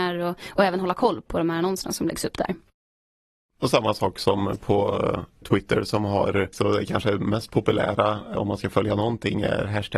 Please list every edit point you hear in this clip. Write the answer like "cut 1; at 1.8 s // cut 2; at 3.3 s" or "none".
cut 1; at 5.4 s // cut 2; at 6.5 s // cut 3; at 8.3 s